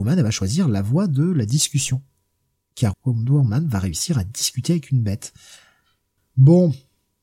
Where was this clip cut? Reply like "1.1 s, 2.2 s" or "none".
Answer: 2.9 s

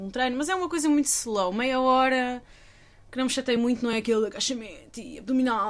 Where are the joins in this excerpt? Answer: none

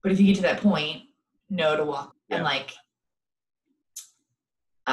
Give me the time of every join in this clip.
2.1 s

